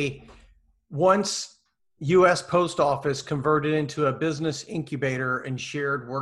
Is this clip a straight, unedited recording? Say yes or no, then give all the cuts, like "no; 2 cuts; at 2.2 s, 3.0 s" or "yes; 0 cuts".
yes; 0 cuts